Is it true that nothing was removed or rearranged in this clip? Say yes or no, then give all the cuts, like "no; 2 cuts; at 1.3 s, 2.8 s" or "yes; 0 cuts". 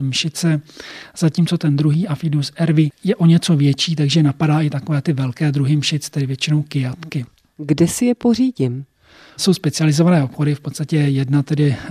yes; 0 cuts